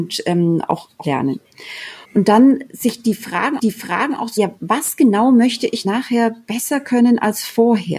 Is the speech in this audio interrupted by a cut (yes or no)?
yes